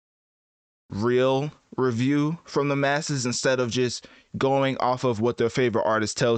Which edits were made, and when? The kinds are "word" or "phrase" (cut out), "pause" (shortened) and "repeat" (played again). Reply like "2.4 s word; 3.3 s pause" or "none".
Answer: none